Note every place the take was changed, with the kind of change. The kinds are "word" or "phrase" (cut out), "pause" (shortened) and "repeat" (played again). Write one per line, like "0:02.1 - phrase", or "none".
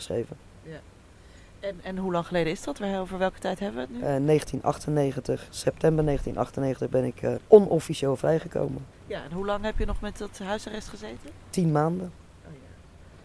0:07.4 - word
0:08.9 - pause